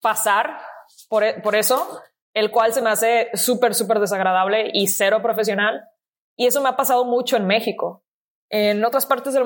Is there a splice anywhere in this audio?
no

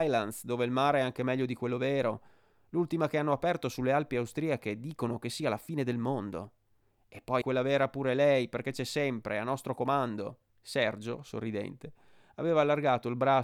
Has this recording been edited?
yes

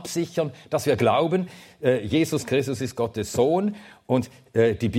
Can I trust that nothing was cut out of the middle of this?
yes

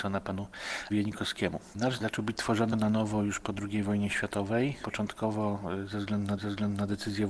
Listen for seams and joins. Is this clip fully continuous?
no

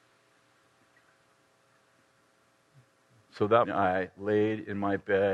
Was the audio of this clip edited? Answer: yes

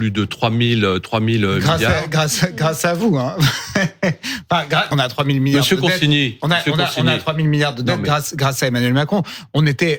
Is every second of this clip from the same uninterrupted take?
no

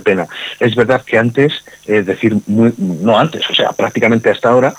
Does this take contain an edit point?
no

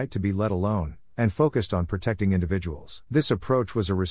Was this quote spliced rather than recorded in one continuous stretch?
yes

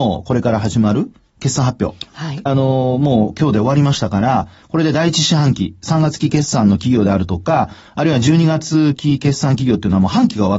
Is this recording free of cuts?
no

